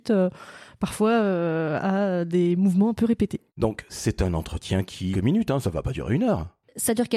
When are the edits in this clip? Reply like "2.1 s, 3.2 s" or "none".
3.5 s, 5.1 s